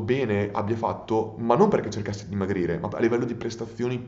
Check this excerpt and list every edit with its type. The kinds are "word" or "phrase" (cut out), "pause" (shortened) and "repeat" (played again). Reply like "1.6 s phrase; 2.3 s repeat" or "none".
2.9 s word